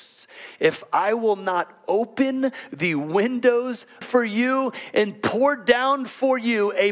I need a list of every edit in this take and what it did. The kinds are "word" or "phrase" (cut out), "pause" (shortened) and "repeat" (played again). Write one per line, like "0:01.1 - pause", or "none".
0:04.0 - phrase